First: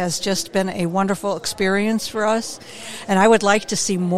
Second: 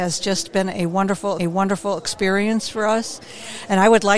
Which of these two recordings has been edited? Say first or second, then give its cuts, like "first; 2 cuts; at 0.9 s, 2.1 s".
second; 1 cut; at 1.4 s